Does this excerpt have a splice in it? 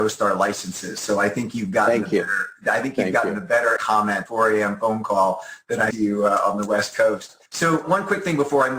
yes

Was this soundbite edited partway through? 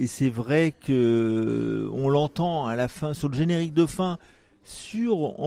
no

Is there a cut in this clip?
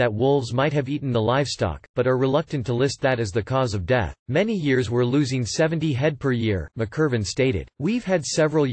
yes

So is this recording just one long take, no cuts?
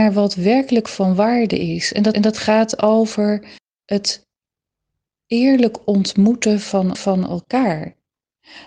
no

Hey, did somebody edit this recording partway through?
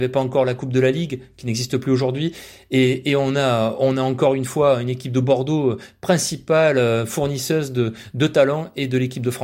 no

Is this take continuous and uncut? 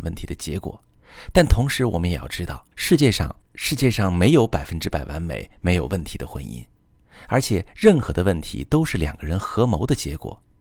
no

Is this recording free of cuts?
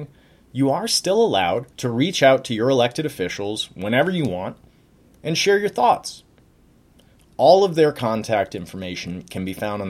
no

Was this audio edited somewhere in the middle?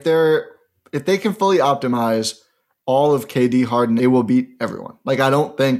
yes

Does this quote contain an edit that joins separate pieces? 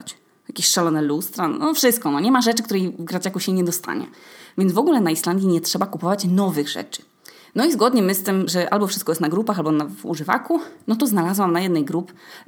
yes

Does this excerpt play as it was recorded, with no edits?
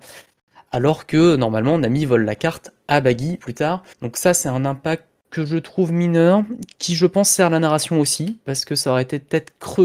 no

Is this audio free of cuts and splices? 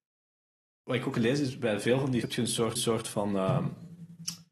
no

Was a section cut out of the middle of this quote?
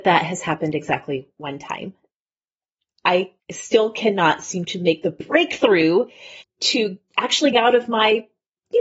yes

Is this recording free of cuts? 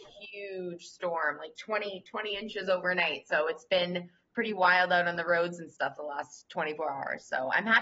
yes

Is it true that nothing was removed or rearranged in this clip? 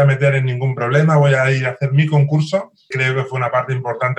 no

